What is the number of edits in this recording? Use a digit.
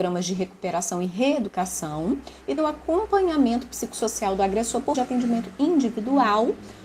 2